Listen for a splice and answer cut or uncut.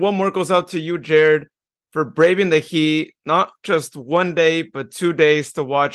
uncut